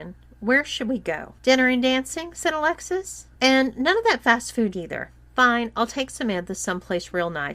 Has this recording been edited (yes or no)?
yes